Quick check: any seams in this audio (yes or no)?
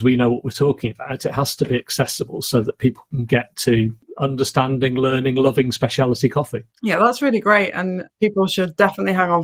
yes